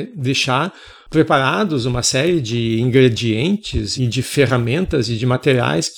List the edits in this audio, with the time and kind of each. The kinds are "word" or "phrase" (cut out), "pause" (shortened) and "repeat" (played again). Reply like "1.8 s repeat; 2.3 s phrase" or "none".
4.0 s word